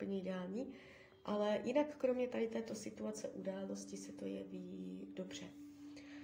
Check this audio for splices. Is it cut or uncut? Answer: uncut